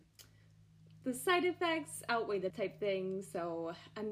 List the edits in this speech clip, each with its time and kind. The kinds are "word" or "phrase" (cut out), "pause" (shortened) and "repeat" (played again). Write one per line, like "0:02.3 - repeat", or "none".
0:02.5 - word